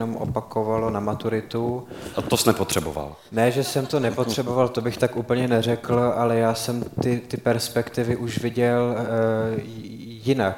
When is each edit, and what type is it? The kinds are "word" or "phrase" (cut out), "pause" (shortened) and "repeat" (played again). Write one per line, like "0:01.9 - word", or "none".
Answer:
none